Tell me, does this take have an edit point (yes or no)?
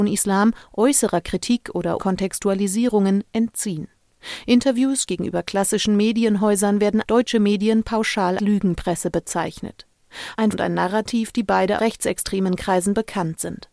yes